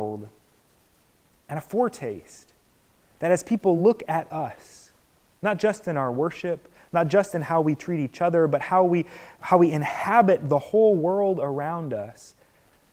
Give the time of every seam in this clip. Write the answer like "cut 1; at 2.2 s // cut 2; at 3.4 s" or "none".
none